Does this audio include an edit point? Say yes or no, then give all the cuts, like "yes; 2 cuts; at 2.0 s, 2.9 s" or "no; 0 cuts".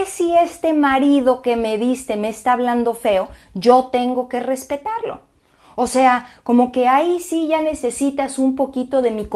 no; 0 cuts